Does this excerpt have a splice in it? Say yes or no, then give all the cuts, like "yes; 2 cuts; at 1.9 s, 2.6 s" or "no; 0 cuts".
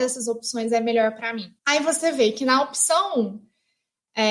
yes; 1 cut; at 1.6 s